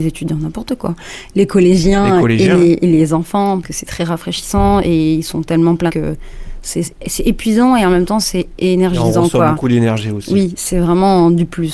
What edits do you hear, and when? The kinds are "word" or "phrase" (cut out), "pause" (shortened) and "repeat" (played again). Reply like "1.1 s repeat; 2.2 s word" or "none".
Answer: 3.6 s word; 5.9 s word

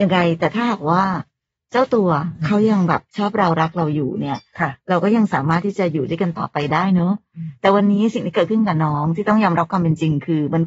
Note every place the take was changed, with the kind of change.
none

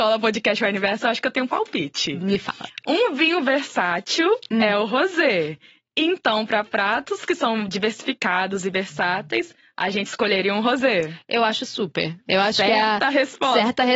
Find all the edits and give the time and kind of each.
none

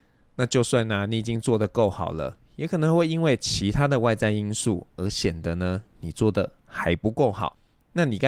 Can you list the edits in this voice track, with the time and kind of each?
none

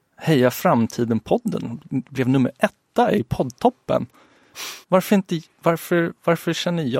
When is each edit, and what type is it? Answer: 4.8 s pause

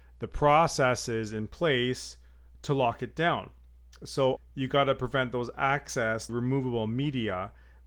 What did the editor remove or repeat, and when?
4.4 s word; 6.3 s word

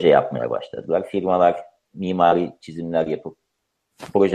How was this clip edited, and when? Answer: none

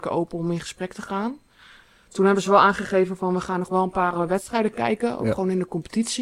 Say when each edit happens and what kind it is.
none

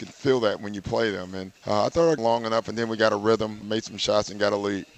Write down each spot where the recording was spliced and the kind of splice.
1.6 s pause; 2.2 s phrase; 3.6 s word

